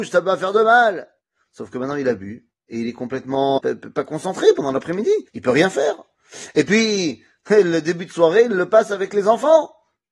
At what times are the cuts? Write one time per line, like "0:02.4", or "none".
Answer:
0:03.6
0:05.3